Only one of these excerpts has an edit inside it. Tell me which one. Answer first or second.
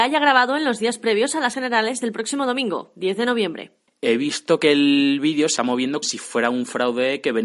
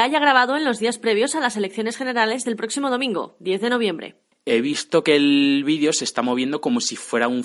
first